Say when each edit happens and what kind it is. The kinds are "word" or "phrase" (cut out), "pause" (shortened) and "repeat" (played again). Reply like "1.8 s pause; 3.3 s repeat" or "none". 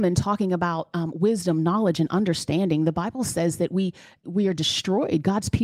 4.2 s word